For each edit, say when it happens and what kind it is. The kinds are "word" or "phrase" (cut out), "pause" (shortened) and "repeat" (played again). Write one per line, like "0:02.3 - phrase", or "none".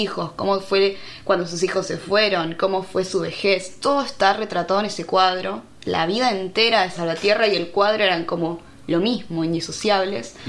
0:06.9 - word